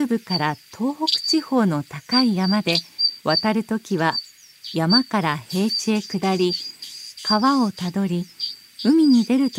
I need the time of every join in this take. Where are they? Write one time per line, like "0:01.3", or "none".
0:03.2